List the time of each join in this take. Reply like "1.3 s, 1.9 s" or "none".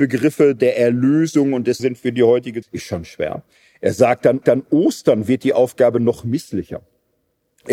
1.8 s, 2.6 s, 4.4 s